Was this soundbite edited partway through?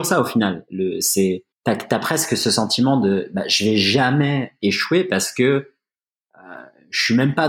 yes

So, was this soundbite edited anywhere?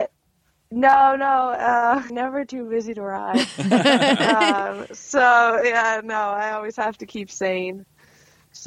yes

